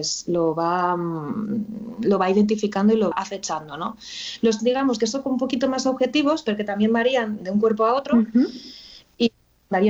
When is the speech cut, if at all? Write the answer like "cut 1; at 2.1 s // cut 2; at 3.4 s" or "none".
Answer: cut 1; at 3.1 s // cut 2; at 4.6 s // cut 3; at 7.4 s